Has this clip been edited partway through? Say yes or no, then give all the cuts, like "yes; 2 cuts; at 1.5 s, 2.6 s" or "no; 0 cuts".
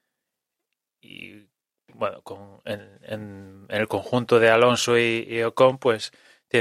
no; 0 cuts